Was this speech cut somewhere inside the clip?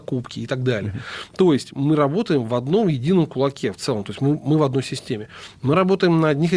no; 0 cuts

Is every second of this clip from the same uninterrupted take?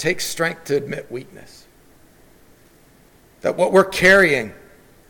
yes; 0 cuts

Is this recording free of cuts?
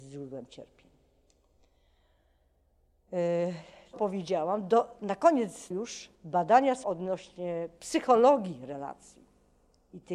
no; 4 cuts; at 3.9 s, 5.7 s, 6.1 s, 6.8 s

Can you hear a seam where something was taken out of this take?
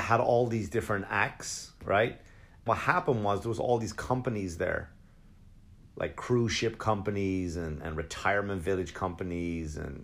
yes; 1 cut; at 2.7 s

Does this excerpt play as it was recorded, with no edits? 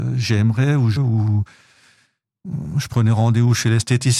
no; 1 cut; at 1.0 s

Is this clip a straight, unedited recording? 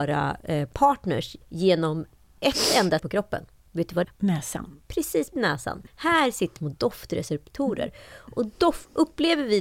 no; 6 cuts; at 1.4 s, 3.0 s, 4.0 s, 5.3 s, 5.9 s, 6.6 s

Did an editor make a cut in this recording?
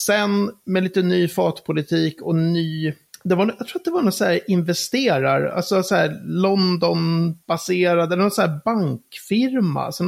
no; 0 cuts

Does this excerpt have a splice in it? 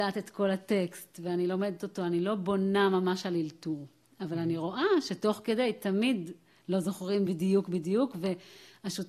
no; 0 cuts

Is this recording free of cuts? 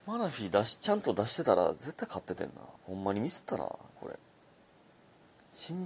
no; 1 cut; at 2.8 s

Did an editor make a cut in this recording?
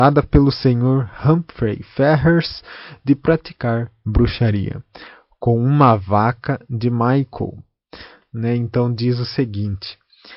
no; 0 cuts

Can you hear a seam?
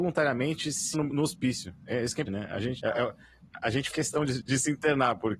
yes; 5 cuts; at 0.9 s, 2.3 s, 2.8 s, 3.9 s, 4.4 s

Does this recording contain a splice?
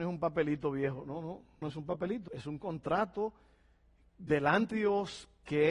yes; 3 cuts; at 1.6 s, 2.3 s, 4.7 s

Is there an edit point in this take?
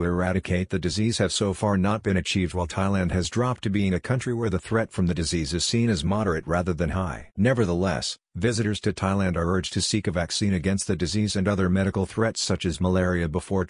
no; 0 cuts

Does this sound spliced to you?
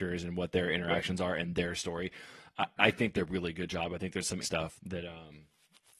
yes; 3 cuts; at 3.1 s, 4.4 s, 4.8 s

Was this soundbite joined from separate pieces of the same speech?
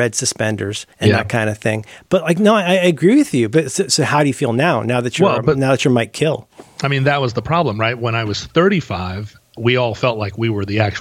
yes; 1 cut; at 0.9 s

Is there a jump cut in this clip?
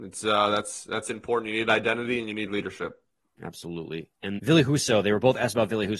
yes; 1 cut; at 4.4 s

